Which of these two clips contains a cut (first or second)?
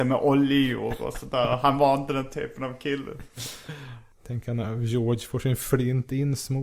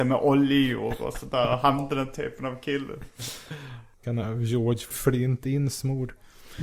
second